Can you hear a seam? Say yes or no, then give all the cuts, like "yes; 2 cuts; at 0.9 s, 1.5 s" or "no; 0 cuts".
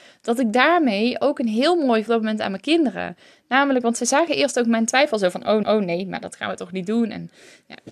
yes; 2 cuts; at 2.1 s, 5.6 s